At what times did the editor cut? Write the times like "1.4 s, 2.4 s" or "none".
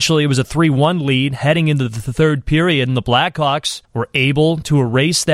3.9 s